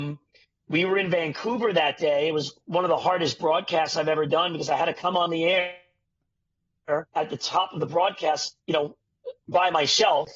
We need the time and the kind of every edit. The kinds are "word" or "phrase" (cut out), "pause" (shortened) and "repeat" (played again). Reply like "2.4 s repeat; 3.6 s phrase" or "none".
7.1 s pause